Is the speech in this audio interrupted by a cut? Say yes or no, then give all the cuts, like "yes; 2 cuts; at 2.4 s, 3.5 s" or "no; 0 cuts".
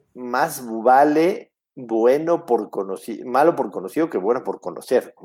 no; 0 cuts